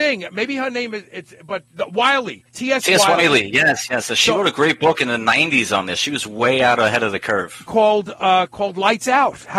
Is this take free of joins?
no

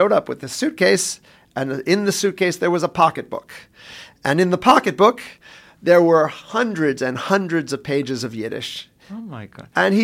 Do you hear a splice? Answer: no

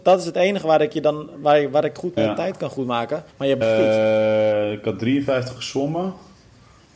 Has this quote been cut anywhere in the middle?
yes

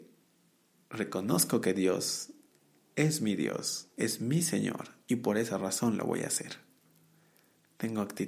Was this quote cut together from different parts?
no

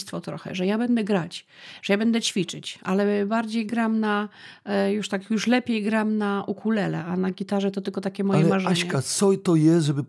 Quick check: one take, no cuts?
yes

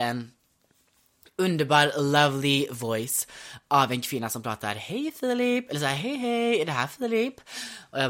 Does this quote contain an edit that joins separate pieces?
no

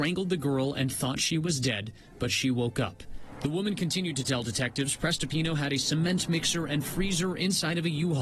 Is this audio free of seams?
yes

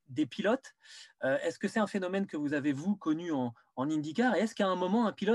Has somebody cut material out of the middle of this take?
no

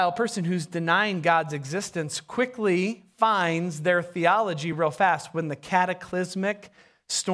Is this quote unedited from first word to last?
yes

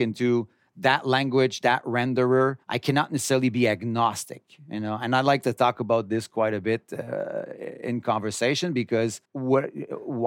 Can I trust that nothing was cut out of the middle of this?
no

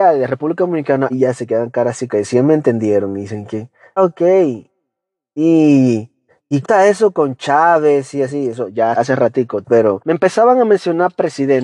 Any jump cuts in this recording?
yes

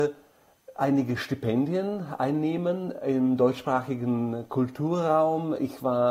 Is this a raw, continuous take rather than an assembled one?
yes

